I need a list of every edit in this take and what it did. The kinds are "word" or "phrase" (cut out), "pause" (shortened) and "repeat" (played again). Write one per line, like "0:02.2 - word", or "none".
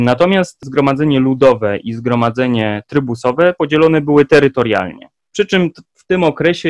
none